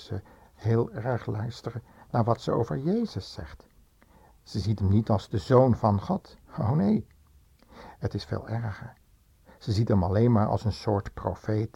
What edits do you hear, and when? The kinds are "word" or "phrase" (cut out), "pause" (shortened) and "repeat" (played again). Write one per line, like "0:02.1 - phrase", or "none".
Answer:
none